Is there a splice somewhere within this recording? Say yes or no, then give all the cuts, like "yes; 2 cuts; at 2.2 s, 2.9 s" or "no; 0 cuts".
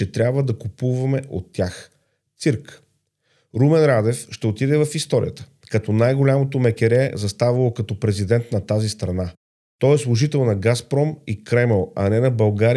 no; 0 cuts